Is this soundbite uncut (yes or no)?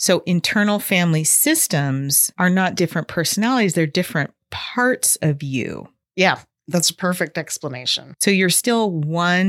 yes